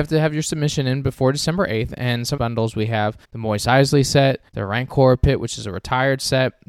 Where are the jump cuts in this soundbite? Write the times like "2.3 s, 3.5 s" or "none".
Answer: 2.4 s, 3.2 s, 4.5 s